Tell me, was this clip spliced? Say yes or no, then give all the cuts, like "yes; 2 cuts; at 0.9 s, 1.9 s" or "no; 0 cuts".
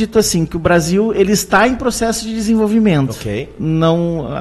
no; 0 cuts